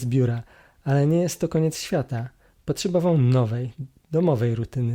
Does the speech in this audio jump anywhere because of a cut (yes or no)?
no